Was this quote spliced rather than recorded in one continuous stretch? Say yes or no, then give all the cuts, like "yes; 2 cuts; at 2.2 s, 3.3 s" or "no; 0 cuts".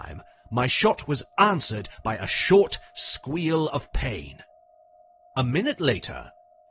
no; 0 cuts